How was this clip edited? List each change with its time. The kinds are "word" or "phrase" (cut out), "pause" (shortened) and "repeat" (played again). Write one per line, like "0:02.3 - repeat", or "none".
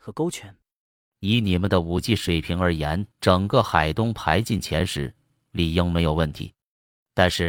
0:03.1 - pause